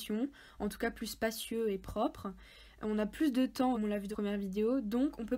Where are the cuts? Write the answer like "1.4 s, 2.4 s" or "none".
3.7 s, 4.1 s